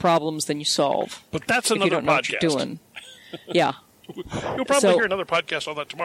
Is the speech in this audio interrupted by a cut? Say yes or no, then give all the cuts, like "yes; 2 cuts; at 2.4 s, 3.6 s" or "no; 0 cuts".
no; 0 cuts